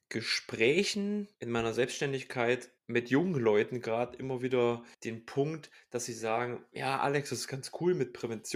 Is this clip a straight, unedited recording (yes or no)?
no